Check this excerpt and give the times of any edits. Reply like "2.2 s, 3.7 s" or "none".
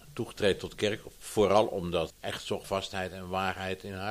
2.1 s, 2.6 s